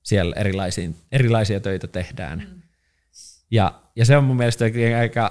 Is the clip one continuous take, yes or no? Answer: yes